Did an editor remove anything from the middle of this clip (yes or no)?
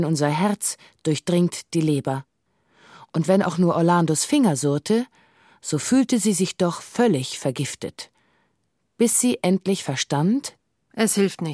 no